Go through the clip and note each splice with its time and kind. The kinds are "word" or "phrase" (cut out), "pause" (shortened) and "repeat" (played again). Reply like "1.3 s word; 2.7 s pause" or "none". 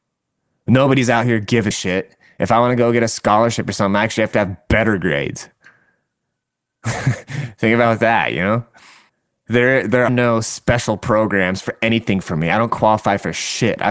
1.7 s word; 9.1 s pause; 10.1 s word